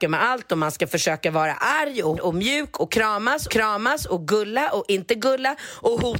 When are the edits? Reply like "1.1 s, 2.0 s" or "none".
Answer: 2.2 s, 3.5 s